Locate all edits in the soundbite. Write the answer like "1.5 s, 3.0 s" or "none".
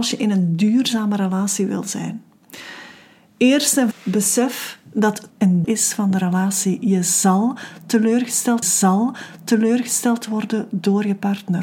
3.9 s, 5.3 s, 5.6 s, 8.6 s